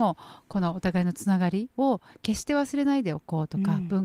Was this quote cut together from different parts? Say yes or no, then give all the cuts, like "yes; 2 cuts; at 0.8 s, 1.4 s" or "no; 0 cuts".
yes; 1 cut; at 1.7 s